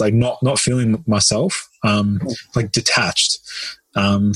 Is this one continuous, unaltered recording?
yes; 0 cuts

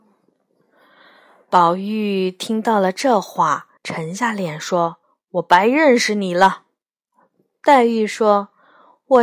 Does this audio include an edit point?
yes; 2 cuts; at 3.8 s, 5.0 s

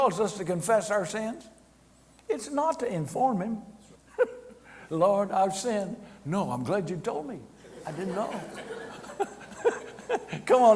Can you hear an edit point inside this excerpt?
yes; 1 cut; at 3.9 s

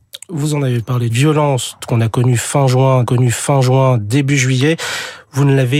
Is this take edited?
yes; 2 cuts; at 1.1 s, 3.0 s

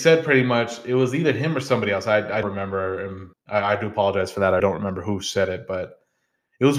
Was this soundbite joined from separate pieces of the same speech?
yes; 3 cuts; at 2.4 s, 3.3 s, 4.6 s

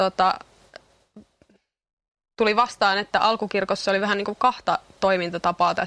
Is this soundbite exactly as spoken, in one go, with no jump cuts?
yes; 0 cuts

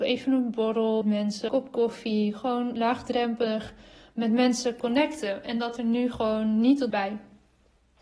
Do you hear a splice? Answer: yes; 4 cuts; at 1.0 s, 1.5 s, 5.8 s, 6.9 s

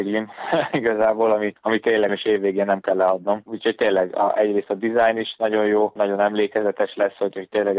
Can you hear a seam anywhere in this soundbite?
yes; 2 cuts; at 1.6 s, 2.1 s

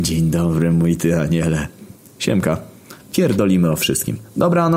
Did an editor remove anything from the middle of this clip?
no; 0 cuts

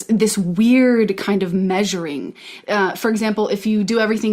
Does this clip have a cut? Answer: no; 0 cuts

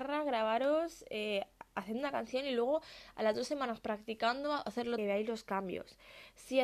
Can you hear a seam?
yes; 1 cut; at 5.0 s

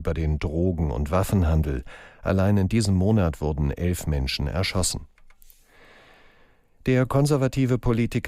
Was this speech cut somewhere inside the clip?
no; 0 cuts

